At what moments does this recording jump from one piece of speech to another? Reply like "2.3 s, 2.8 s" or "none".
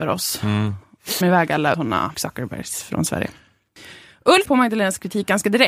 1.2 s, 1.7 s, 2.1 s, 4.4 s